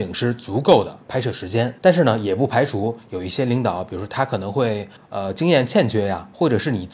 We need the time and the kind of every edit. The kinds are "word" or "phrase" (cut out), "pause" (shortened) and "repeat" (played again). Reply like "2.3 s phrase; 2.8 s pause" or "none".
1.8 s pause; 5.0 s pause